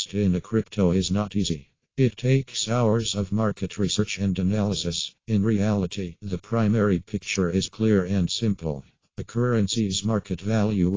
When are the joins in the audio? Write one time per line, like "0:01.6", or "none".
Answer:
0:05.2

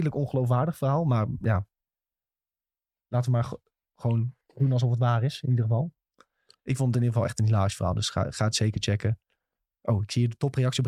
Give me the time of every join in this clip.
none

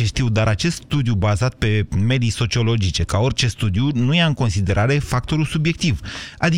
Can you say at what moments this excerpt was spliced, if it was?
none

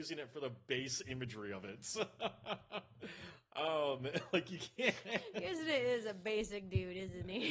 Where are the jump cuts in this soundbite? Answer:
none

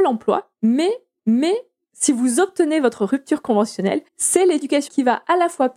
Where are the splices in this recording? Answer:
0:01.2
0:04.1
0:04.9

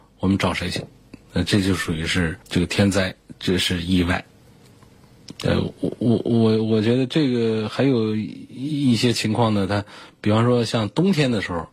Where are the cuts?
0:01.2
0:02.4
0:05.4

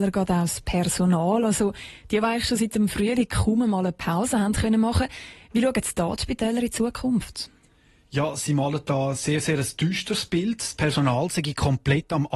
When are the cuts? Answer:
none

